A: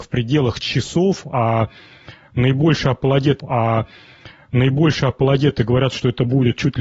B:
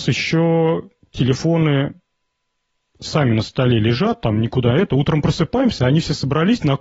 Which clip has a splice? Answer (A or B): A